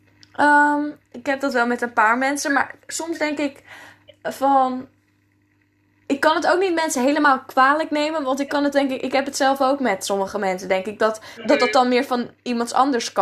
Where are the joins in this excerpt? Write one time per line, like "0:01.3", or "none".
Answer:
0:08.7
0:11.4